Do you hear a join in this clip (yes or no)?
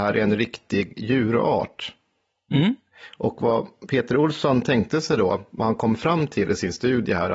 no